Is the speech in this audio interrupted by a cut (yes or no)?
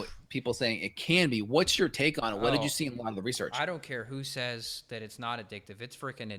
no